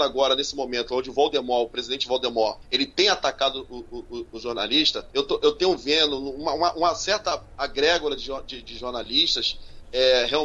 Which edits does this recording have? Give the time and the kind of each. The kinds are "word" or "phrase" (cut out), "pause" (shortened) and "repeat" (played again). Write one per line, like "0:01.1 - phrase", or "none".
0:02.6 - pause
0:05.1 - pause